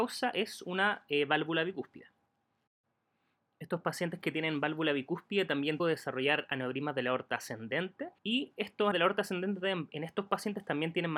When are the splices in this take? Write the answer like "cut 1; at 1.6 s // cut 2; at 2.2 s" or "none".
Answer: cut 1; at 5.8 s // cut 2; at 8.2 s // cut 3; at 8.9 s